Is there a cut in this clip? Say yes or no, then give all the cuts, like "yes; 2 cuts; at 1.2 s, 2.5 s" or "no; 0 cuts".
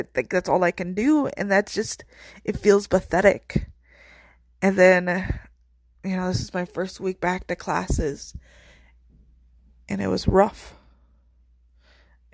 no; 0 cuts